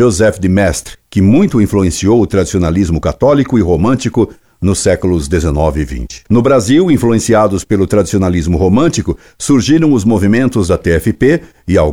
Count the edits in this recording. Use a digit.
0